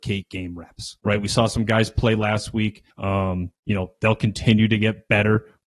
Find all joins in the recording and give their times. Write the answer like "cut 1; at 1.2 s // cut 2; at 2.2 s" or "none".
cut 1; at 1.0 s // cut 2; at 2.9 s